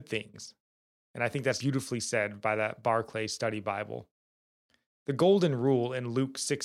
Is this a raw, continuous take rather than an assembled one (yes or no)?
no